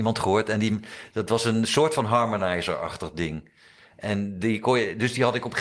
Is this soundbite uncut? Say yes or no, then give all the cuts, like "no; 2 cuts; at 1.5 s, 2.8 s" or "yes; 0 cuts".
yes; 0 cuts